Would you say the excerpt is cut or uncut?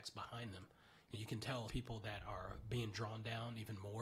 cut